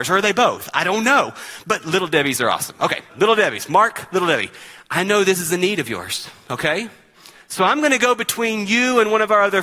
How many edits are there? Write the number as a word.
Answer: one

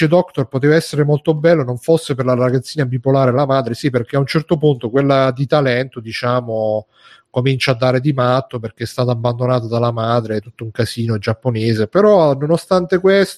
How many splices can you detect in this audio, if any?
zero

